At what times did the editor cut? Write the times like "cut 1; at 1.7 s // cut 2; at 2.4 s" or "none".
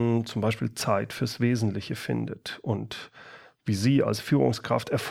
none